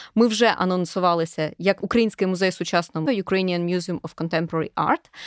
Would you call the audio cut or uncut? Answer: cut